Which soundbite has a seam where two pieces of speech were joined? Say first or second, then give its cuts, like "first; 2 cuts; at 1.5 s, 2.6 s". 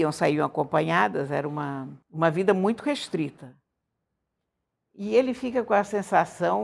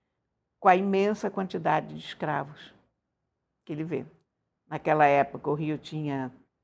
first; 1 cut; at 2.0 s